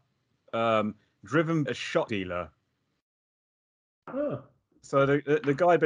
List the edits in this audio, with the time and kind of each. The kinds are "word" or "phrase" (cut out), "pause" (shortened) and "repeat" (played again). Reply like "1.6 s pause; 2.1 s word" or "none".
1.7 s word; 2.1 s word